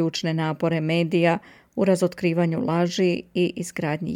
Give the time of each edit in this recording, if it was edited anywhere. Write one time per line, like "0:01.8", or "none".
none